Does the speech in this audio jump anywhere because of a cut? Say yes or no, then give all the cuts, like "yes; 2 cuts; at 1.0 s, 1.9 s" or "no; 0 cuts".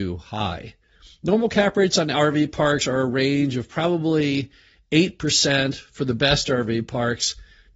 no; 0 cuts